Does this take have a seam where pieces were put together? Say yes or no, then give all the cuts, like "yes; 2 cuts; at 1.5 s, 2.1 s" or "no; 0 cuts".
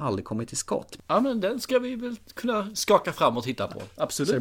no; 0 cuts